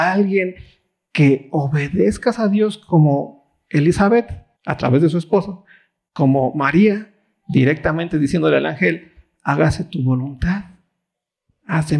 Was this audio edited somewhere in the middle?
yes; 1 cut; at 4.6 s

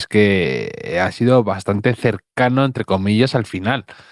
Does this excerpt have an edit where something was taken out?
no; 0 cuts

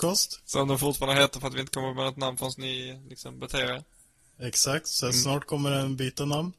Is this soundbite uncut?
yes; 0 cuts

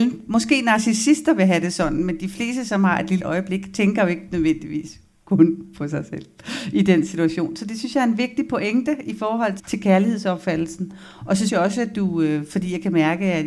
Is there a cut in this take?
yes; 3 cuts; at 3.2 s, 9.6 s, 11.5 s

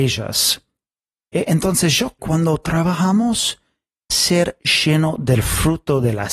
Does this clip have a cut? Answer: yes; 2 cuts; at 2.2 s, 4.1 s

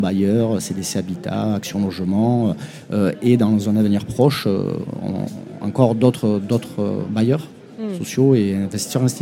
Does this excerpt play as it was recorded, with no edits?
yes; 0 cuts

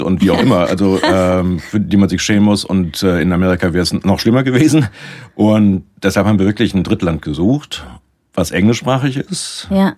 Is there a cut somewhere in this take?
no; 0 cuts

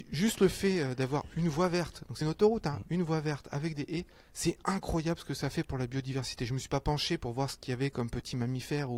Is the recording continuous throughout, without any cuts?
no; 1 cut; at 2.2 s

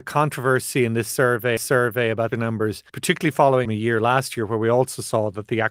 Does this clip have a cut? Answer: yes; 4 cuts; at 1.6 s, 2.3 s, 2.9 s, 3.7 s

